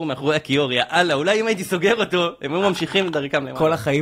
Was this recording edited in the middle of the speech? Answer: no; 0 cuts

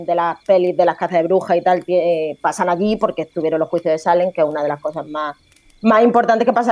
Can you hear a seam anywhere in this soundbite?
no; 0 cuts

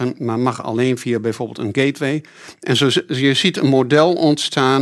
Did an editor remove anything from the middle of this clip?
no; 0 cuts

